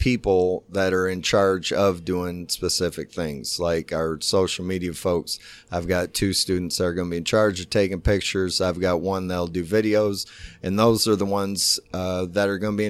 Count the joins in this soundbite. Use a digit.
0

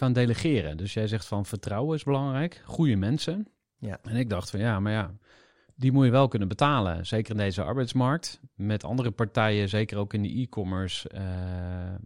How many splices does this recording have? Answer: 0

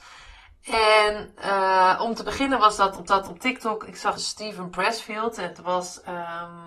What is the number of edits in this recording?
2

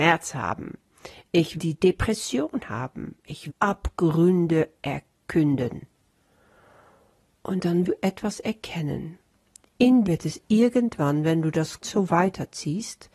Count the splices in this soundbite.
5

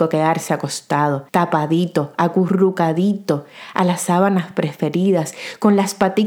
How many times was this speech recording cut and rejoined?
1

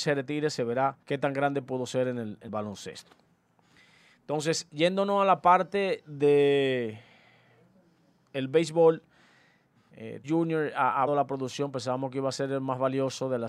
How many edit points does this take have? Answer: 4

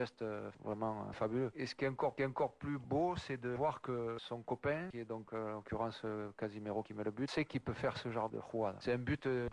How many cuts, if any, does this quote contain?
3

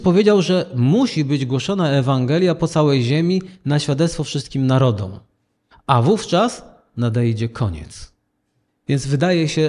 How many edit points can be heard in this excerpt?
0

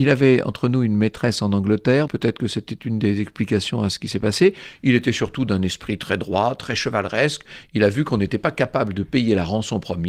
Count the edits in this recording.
1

